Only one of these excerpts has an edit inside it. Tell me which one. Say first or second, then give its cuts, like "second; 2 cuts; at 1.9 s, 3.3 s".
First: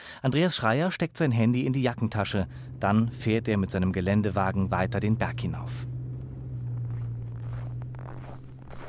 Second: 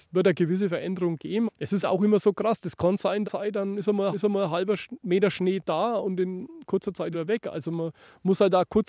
second; 5 cuts; at 1.5 s, 1.8 s, 3.2 s, 4.1 s, 7.1 s